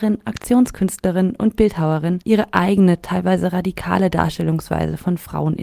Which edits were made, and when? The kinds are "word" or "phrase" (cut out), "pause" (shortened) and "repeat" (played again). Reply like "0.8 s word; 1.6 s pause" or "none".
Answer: 2.2 s pause